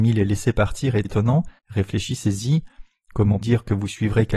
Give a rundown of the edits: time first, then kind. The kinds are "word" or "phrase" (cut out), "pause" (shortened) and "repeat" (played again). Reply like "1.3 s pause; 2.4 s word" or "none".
1.0 s word; 1.6 s pause; 3.4 s word